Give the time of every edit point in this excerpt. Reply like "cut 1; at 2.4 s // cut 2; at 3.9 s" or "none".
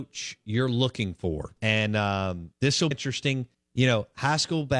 cut 1; at 1.6 s // cut 2; at 2.5 s // cut 3; at 2.9 s // cut 4; at 3.5 s